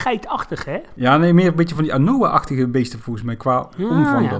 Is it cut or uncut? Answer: uncut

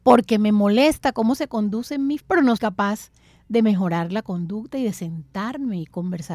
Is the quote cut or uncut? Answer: cut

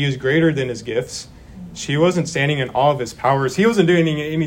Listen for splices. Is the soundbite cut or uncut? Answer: uncut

